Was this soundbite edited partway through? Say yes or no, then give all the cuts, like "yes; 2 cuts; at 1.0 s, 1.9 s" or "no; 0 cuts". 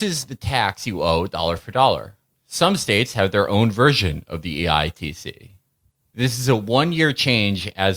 no; 0 cuts